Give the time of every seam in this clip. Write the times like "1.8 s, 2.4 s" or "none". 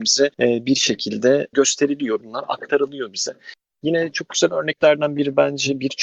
1.5 s, 2.2 s